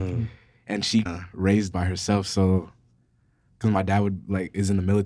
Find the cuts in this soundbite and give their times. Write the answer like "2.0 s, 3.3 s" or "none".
1.1 s, 1.7 s